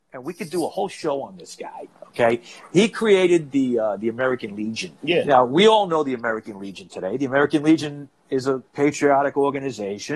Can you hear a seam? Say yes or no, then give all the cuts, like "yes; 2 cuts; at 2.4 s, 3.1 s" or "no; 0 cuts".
yes; 2 cuts; at 5.0 s, 8.7 s